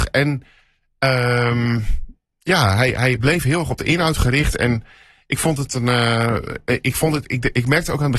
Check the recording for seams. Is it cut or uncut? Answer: uncut